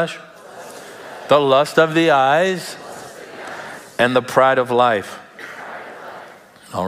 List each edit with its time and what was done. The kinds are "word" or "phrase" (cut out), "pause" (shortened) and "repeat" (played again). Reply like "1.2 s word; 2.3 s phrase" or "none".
none